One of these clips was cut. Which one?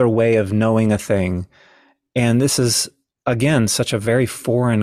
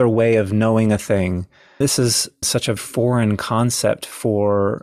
second; 3 cuts; at 1.8 s, 2.4 s, 2.8 s

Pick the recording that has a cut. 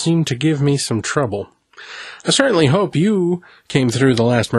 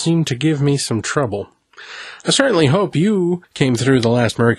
second; 1 cut; at 3.4 s

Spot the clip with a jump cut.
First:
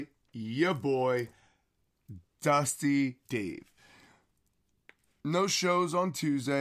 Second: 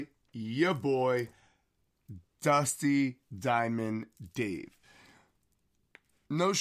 first; 1 cut; at 3.3 s

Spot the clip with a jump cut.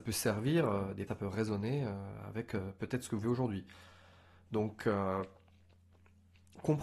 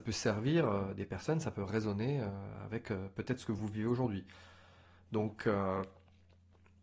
first; 2 cuts; at 1.1 s, 3.2 s

